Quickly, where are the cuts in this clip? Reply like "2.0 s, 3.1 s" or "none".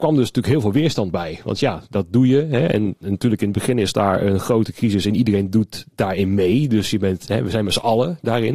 none